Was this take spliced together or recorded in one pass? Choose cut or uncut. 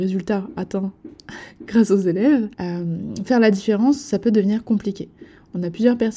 cut